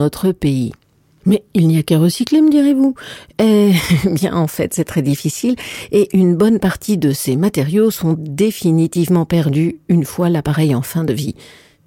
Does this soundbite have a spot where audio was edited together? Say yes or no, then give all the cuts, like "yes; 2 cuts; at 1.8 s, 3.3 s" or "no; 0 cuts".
yes; 1 cut; at 8.1 s